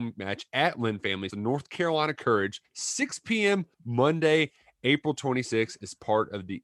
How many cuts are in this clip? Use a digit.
3